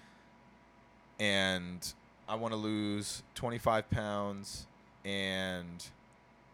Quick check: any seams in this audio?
yes; 2 cuts; at 2.2 s, 4.9 s

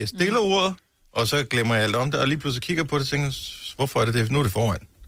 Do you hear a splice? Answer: no; 0 cuts

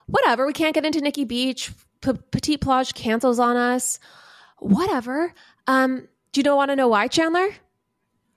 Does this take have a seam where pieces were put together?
no; 0 cuts

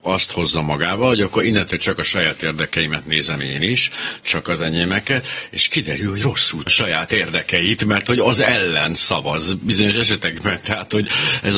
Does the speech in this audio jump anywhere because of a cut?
yes; 1 cut; at 6.7 s

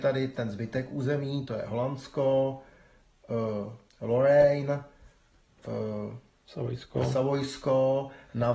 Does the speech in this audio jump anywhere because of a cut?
no; 0 cuts

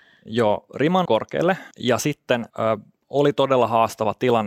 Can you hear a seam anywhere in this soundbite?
yes; 3 cuts; at 1.0 s, 1.7 s, 2.5 s

